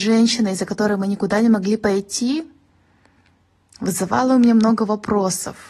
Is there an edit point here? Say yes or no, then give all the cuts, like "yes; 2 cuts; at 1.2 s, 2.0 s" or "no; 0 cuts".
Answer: no; 0 cuts